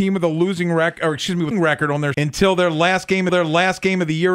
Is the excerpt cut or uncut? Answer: cut